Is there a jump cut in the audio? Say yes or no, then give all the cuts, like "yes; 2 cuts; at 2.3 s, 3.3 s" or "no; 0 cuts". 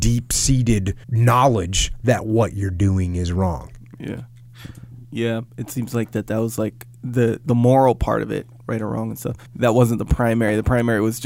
yes; 3 cuts; at 1.0 s, 5.0 s, 9.5 s